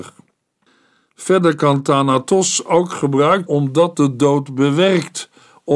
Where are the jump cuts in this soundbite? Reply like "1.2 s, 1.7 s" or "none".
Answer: 3.5 s, 3.9 s